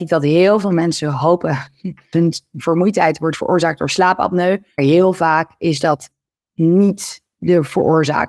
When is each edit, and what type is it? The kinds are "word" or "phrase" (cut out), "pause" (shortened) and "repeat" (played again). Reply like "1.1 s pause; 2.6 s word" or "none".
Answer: 2.1 s word; 4.8 s word